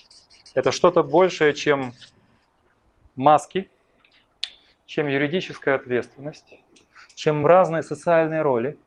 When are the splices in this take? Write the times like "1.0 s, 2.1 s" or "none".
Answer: none

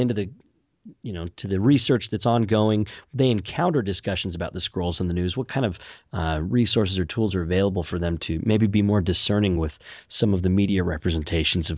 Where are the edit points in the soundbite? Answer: none

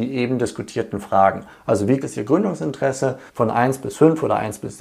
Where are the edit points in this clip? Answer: 2.0 s, 3.3 s

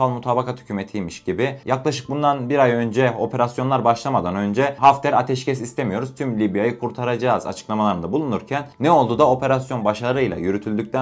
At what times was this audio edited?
8.7 s

